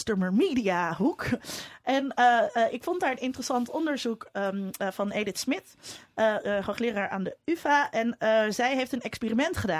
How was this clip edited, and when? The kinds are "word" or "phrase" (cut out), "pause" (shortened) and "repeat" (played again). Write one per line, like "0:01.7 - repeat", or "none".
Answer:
none